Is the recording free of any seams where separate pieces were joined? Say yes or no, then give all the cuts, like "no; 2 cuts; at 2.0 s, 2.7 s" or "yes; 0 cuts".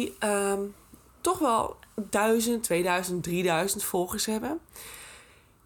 yes; 0 cuts